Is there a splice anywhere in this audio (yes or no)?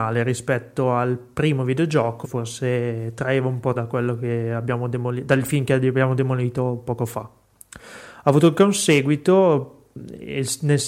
yes